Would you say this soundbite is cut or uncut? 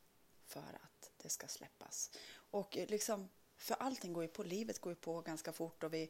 uncut